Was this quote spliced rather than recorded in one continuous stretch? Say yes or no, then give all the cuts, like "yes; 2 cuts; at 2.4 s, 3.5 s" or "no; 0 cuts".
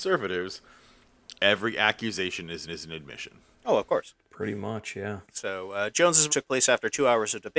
yes; 5 cuts; at 2.7 s, 3.5 s, 4.2 s, 5.2 s, 6.3 s